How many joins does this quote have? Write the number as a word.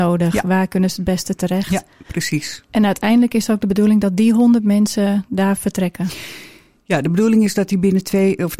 zero